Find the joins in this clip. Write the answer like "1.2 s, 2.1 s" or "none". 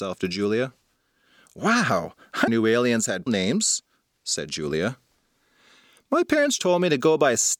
2.5 s, 3.3 s, 6.6 s